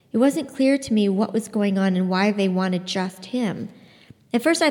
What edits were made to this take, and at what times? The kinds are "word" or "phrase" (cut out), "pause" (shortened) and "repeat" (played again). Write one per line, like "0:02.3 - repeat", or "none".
none